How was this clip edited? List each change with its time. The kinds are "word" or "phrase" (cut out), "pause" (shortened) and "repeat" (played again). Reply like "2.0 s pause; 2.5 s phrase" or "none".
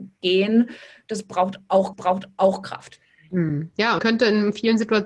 1.9 s repeat; 4.0 s word

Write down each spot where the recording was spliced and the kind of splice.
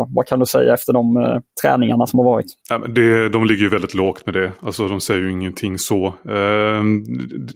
1.5 s pause; 2.6 s pause

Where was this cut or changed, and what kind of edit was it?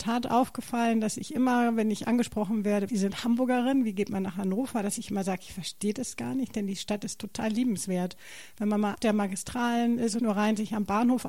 2.9 s word; 8.9 s word; 10.2 s word

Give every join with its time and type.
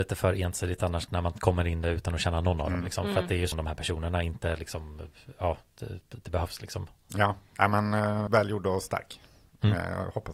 3.5 s phrase; 8.3 s word

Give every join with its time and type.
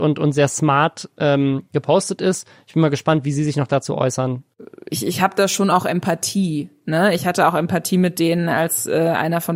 none

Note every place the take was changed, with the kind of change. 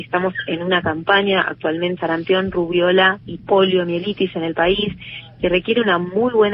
2.0 s phrase; 3.2 s word

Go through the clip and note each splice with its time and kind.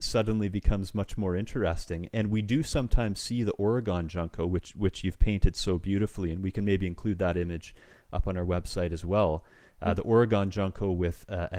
none

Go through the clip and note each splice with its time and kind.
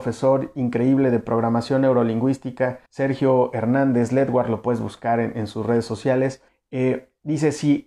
2.9 s pause; 6.5 s pause

